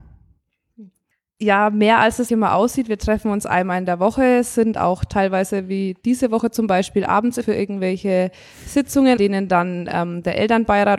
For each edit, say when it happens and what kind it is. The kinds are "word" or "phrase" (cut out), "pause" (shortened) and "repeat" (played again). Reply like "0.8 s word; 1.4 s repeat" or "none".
1.1 s pause; 2.3 s word; 7.4 s phrase; 9.2 s word